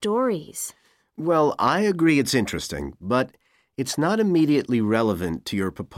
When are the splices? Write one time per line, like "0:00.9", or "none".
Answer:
none